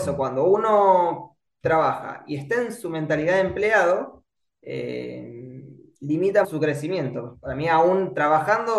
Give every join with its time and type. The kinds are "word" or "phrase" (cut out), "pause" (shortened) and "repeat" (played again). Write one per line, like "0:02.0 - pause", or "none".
0:06.4 - word